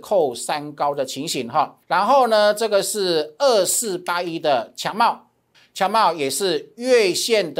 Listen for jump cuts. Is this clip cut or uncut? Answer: cut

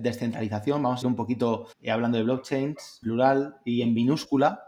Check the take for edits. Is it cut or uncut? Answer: cut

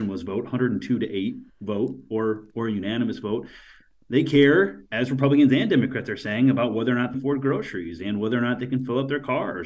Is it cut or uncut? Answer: cut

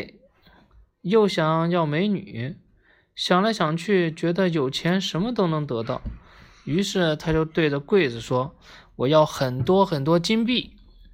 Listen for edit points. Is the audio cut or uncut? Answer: uncut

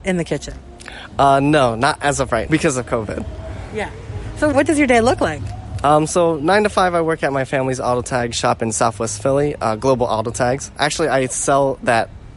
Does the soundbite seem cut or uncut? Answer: cut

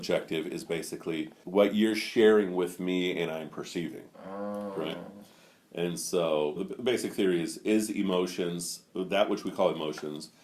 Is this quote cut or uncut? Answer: cut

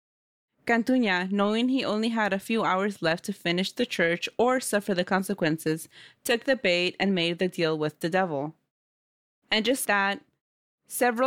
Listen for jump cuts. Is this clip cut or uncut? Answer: cut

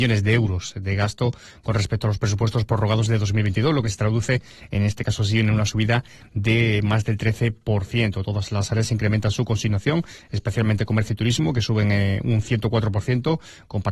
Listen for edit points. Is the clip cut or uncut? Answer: uncut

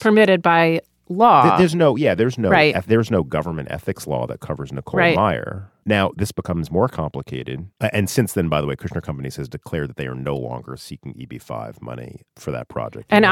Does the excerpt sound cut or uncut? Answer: cut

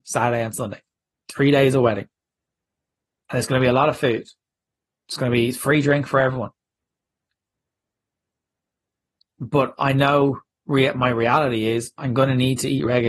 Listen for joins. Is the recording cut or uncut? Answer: uncut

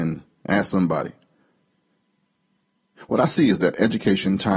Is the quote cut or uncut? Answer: uncut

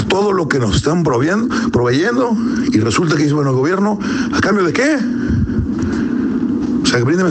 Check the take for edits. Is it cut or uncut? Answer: uncut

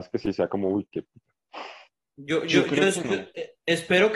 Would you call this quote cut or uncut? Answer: uncut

